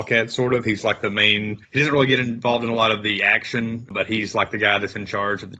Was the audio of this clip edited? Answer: no; 0 cuts

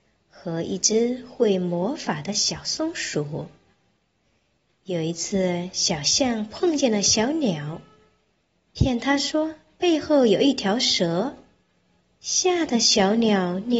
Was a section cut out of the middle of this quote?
no; 0 cuts

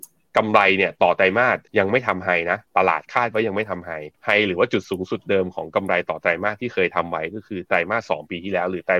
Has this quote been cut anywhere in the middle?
yes; 3 cuts; at 1.7 s, 2.7 s, 4.1 s

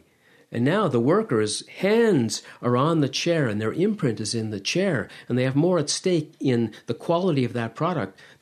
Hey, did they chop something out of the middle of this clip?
no; 0 cuts

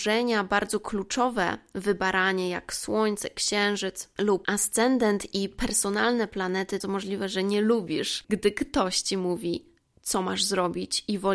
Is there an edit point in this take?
yes; 1 cut; at 6.8 s

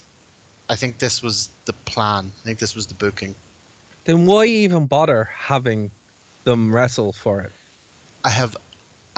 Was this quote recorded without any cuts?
yes; 0 cuts

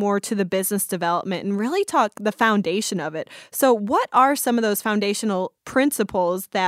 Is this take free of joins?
no; 1 cut; at 5.6 s

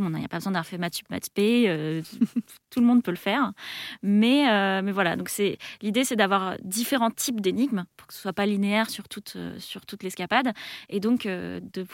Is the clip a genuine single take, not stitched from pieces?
yes; 0 cuts

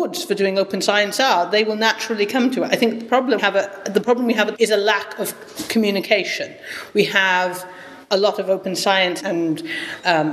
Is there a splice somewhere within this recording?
yes; 3 cuts; at 3.4 s, 4.5 s, 9.2 s

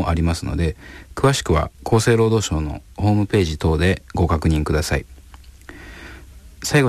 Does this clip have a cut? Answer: yes; 1 cut; at 1.7 s

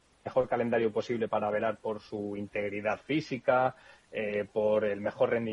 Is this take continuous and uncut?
yes; 0 cuts

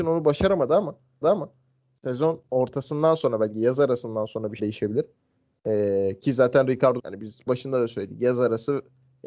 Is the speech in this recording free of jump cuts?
no; 4 cuts; at 1.2 s, 4.6 s, 7.0 s, 7.5 s

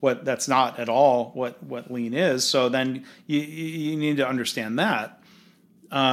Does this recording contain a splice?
no; 0 cuts

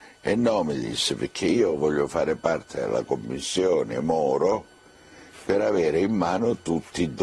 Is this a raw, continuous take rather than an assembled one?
yes; 0 cuts

